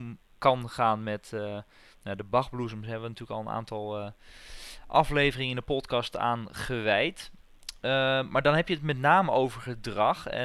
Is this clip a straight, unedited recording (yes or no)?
yes